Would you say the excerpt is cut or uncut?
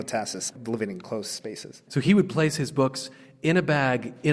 uncut